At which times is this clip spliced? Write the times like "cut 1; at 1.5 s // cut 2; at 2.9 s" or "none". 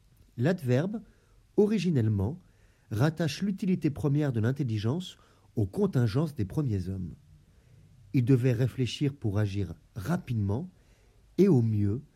none